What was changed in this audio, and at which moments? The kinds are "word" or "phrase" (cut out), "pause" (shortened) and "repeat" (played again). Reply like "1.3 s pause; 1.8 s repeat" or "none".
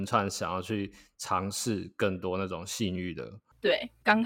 none